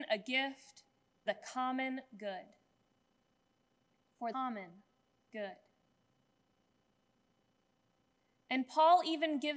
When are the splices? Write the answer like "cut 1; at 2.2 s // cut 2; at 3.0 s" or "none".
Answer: cut 1; at 1.3 s // cut 2; at 4.3 s